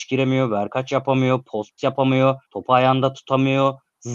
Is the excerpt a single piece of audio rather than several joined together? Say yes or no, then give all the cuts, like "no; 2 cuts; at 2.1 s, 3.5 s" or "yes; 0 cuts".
no; 2 cuts; at 1.8 s, 2.4 s